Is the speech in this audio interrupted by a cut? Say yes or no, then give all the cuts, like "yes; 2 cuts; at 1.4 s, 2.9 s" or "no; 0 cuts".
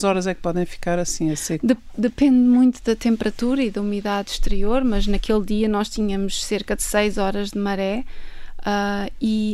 no; 0 cuts